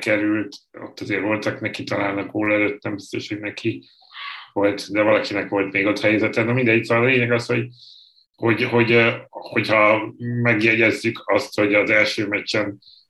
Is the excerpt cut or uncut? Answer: uncut